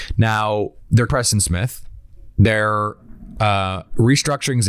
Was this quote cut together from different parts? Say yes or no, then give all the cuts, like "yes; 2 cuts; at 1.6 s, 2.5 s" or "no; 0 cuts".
yes; 1 cut; at 1.1 s